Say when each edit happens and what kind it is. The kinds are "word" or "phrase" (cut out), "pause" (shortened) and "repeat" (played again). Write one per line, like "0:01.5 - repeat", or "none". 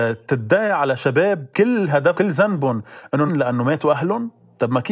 0:01.5 - pause
0:02.1 - word
0:03.3 - word